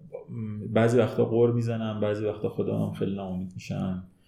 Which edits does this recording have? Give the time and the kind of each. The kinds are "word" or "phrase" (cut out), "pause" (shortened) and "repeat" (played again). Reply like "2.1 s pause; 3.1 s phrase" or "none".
none